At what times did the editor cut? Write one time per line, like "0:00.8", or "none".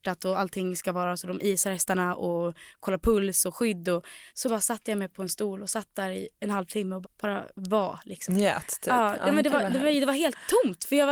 0:04.3
0:07.0